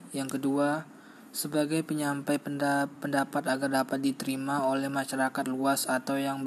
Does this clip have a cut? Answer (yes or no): no